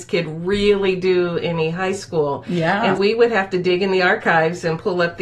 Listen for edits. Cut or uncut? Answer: cut